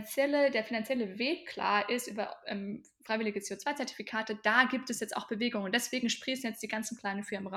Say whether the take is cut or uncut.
uncut